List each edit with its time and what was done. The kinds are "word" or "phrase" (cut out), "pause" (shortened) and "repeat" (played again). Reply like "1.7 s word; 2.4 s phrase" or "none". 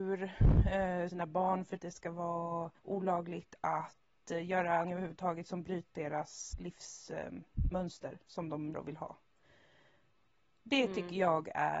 1.1 s phrase; 1.8 s word; 2.8 s pause; 4.8 s word; 5.9 s word; 6.5 s word; 8.7 s word